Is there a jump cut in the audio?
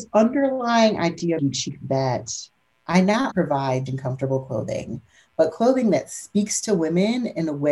yes; 5 cuts; at 1.4 s, 1.8 s, 2.7 s, 3.3 s, 3.9 s

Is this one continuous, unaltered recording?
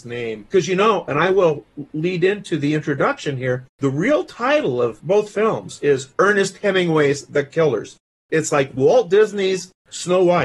no; 2 cuts; at 3.7 s, 6.1 s

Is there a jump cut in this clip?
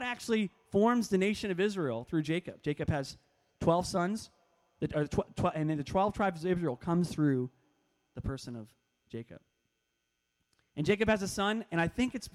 no; 0 cuts

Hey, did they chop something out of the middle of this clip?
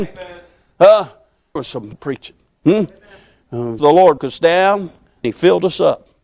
yes; 5 cuts; at 1.6 s, 1.9 s, 3.8 s, 4.2 s, 5.2 s

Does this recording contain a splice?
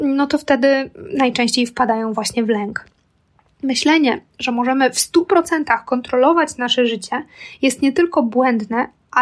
no; 0 cuts

